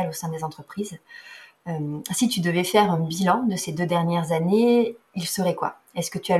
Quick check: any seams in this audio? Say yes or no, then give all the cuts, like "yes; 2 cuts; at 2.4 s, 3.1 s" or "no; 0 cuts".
no; 0 cuts